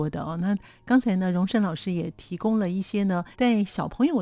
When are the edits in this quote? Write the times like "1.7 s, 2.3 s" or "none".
3.3 s